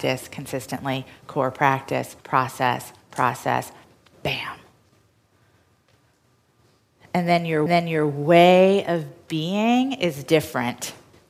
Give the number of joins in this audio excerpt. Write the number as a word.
two